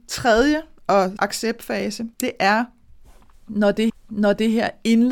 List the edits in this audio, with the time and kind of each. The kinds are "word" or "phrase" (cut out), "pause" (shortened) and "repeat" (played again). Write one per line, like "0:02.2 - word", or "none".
0:01.2 - word
0:02.1 - pause
0:03.9 - repeat